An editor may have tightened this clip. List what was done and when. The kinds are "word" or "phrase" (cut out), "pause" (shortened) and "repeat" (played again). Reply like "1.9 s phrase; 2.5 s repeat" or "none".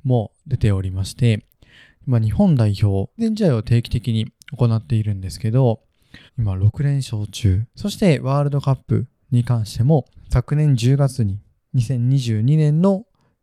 3.2 s phrase; 6.3 s pause; 7.7 s pause; 10.1 s pause

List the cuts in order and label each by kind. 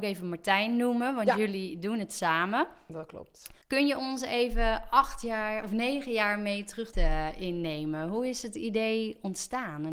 3.6 s pause; 6.9 s phrase

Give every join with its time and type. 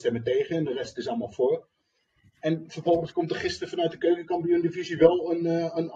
none

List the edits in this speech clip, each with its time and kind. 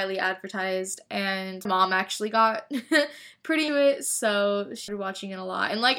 1.7 s word; 3.7 s word; 4.9 s word

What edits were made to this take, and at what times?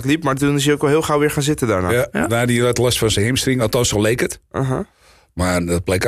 none

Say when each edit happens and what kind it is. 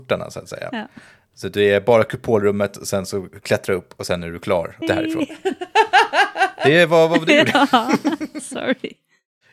4.8 s word

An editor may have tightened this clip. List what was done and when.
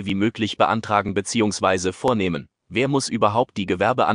2.6 s pause

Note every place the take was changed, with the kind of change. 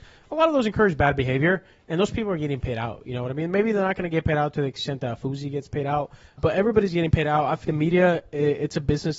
6.4 s word; 7.6 s word

